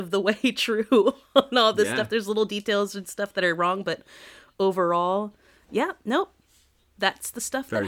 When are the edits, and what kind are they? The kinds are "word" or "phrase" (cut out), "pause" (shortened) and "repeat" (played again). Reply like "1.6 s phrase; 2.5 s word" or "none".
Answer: none

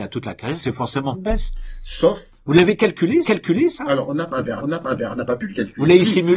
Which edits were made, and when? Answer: 1.1 s word; 3.2 s repeat; 4.6 s repeat

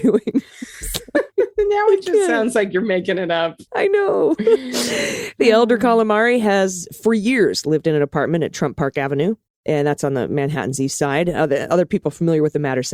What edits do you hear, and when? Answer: 3.7 s pause

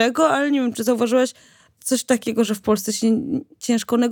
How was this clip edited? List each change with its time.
1.8 s word

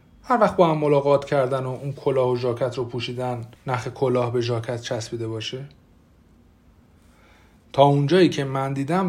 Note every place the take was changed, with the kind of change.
3.6 s pause

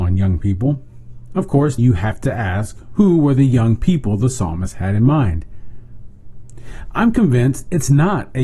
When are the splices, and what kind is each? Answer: 1.8 s word

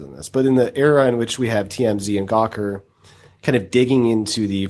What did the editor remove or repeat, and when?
none

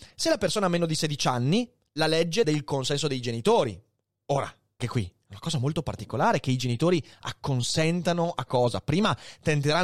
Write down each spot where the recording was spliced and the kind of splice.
2.4 s word; 4.8 s word; 8.5 s word

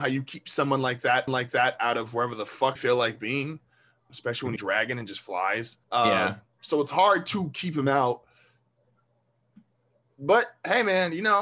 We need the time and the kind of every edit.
1.3 s repeat; 2.8 s word; 4.1 s word; 4.6 s phrase; 5.8 s pause

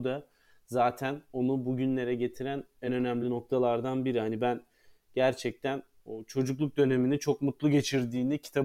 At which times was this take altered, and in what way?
none

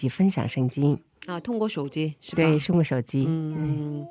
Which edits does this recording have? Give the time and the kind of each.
none

